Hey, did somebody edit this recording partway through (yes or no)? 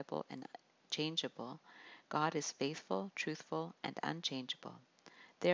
no